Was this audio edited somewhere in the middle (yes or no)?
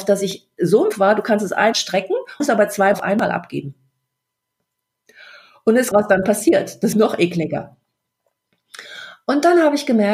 yes